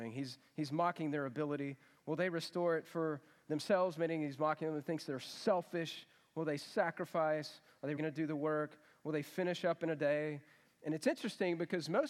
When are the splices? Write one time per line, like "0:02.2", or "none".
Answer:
0:08.0

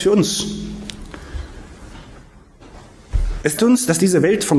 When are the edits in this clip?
0:03.6

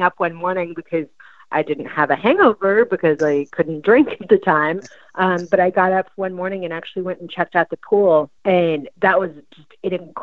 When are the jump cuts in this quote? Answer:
0:08.4

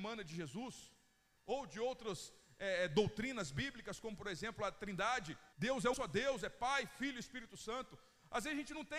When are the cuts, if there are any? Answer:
0:05.5
0:05.9

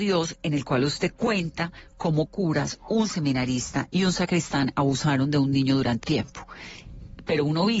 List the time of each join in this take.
0:02.3
0:06.0

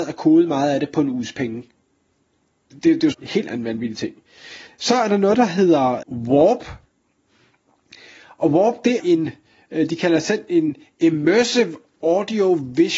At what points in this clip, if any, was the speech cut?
0:02.7
0:03.1
0:04.7
0:06.0
0:09.0

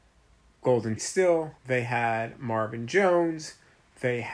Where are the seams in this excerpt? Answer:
0:01.0
0:01.6

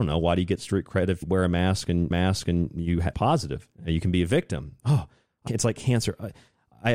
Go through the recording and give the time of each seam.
0:01.2
0:02.1
0:03.1
0:03.8
0:05.5

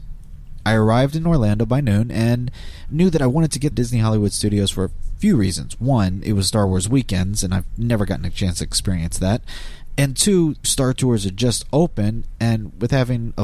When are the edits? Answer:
0:03.7
0:10.6

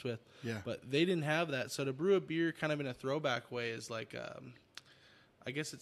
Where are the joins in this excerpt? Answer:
none

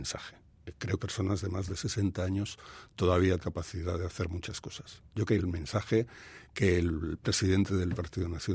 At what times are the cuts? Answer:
0:01.0
0:03.4
0:05.3
0:06.4

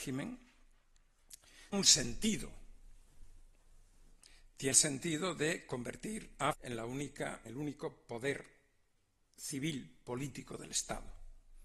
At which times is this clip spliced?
0:01.7
0:04.7
0:06.5
0:07.5

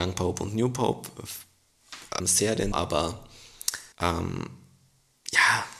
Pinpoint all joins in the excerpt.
0:02.2
0:02.7
0:03.9

